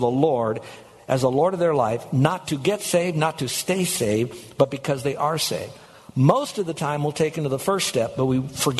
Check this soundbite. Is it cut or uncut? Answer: uncut